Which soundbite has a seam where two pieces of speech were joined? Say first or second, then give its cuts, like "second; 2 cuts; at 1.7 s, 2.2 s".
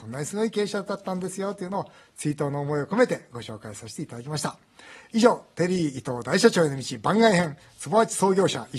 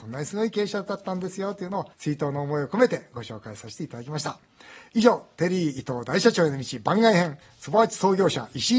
second; 1 cut; at 1.9 s